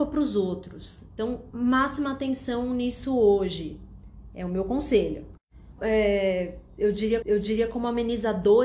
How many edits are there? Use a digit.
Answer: 3